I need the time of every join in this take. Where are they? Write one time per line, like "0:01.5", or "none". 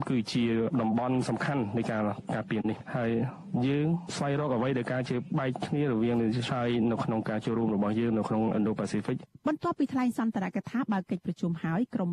0:06.5